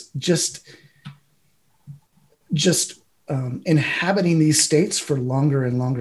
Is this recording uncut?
yes; 0 cuts

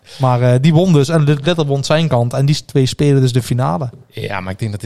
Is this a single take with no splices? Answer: yes; 0 cuts

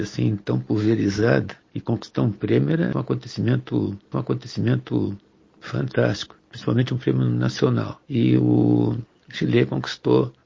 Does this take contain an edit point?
yes; 3 cuts; at 2.9 s, 4.1 s, 8.0 s

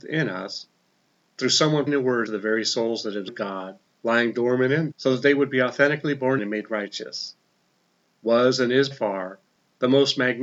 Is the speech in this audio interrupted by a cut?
yes; 6 cuts; at 1.9 s, 2.3 s, 3.3 s, 4.9 s, 6.4 s, 8.9 s

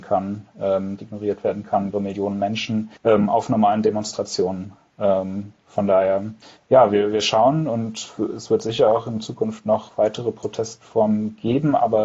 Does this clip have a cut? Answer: yes; 4 cuts; at 1.0 s, 1.9 s, 3.0 s, 6.4 s

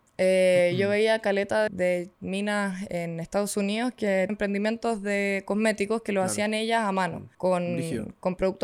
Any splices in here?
yes; 3 cuts; at 1.7 s, 4.3 s, 7.3 s

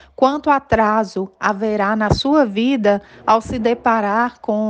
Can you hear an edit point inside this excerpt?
no; 0 cuts

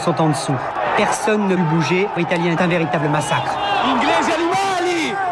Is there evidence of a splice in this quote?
yes; 3 cuts; at 1.6 s, 2.2 s, 2.6 s

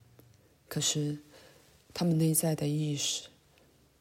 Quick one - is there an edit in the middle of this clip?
no; 0 cuts

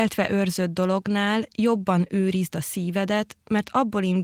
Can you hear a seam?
no; 0 cuts

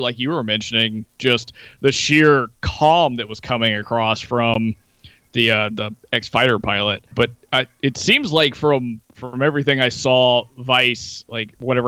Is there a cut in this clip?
yes; 1 cut; at 7.1 s

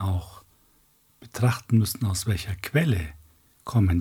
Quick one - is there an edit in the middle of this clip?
no; 0 cuts

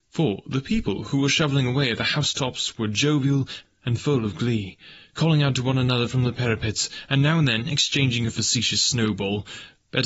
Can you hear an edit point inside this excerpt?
no; 0 cuts

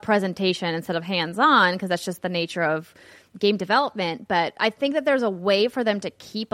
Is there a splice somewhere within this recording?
no; 0 cuts

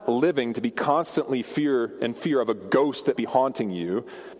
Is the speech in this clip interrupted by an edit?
yes; 1 cut; at 3.2 s

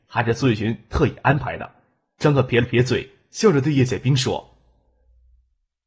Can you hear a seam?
no; 0 cuts

